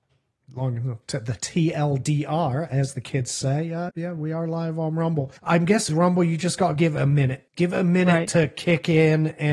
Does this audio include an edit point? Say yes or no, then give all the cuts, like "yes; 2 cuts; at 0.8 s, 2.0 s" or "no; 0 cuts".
yes; 4 cuts; at 3.9 s, 5.4 s, 5.9 s, 7.5 s